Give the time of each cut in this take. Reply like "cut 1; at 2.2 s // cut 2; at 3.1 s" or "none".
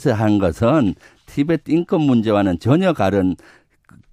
none